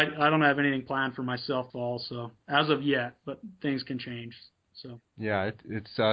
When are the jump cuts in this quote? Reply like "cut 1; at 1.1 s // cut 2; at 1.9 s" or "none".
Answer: cut 1; at 1.7 s